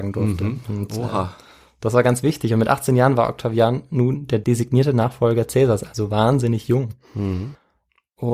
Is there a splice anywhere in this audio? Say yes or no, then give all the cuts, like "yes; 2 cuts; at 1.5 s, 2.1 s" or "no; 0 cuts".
no; 0 cuts